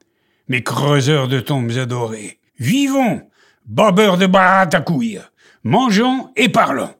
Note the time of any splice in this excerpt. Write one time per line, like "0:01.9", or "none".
0:02.5